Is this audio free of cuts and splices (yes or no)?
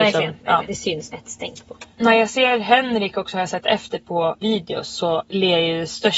no